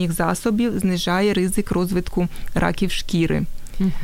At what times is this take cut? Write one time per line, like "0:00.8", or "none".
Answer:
none